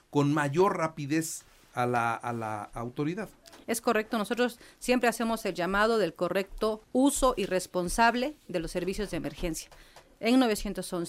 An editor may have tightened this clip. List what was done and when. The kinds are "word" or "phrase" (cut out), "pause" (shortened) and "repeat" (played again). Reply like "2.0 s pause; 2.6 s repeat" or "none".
6.8 s pause